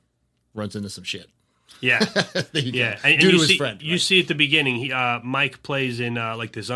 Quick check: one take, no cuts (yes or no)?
yes